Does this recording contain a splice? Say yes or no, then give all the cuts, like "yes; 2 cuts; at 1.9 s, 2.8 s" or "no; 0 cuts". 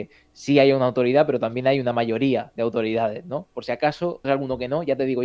yes; 1 cut; at 4.2 s